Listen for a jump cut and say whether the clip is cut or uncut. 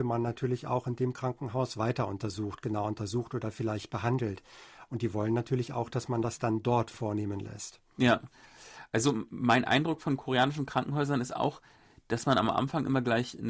uncut